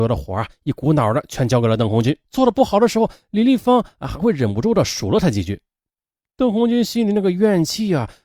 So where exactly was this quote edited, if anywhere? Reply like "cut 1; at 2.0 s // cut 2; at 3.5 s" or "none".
cut 1; at 2.3 s

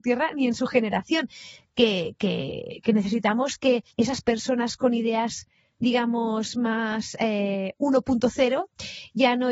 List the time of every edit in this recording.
cut 1; at 3.9 s

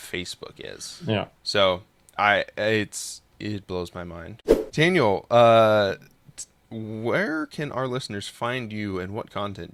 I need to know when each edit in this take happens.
cut 1; at 1.4 s

